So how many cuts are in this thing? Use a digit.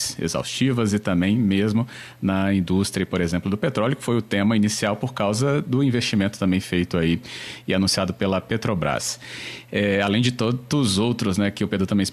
0